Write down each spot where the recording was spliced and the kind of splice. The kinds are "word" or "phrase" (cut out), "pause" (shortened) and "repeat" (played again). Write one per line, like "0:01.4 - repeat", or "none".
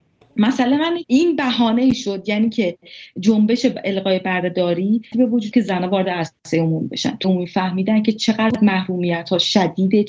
0:01.0 - word
0:05.1 - word
0:05.5 - word
0:07.2 - word